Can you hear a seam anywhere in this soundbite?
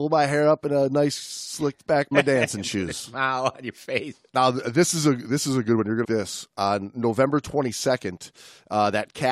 yes; 3 cuts; at 2.1 s, 4.3 s, 6.0 s

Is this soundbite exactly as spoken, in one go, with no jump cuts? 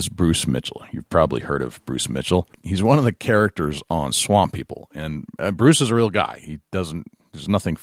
no; 1 cut; at 2.5 s

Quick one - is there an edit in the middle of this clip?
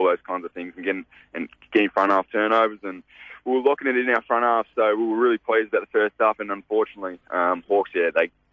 no; 0 cuts

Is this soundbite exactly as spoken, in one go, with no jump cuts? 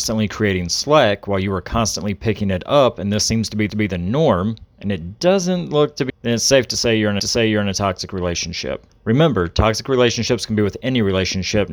no; 4 cuts; at 3.7 s, 6.1 s, 7.2 s, 8.9 s

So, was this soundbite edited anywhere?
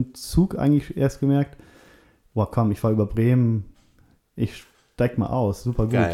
no; 0 cuts

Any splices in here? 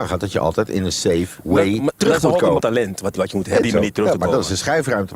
yes; 3 cuts; at 2.6 s, 3.2 s, 3.6 s

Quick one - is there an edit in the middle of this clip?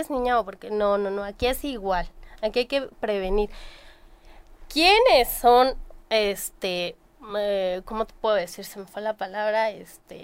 no; 0 cuts

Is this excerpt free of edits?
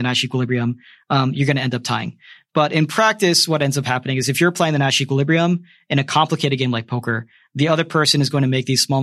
yes; 0 cuts

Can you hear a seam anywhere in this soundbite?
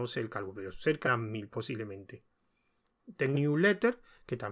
yes; 2 cuts; at 1.0 s, 3.3 s

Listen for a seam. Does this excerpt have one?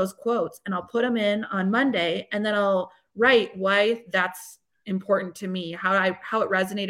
no; 0 cuts

